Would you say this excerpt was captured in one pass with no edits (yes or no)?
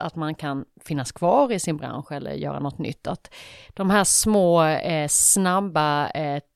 yes